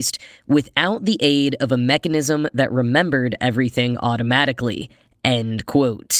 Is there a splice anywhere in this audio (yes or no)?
no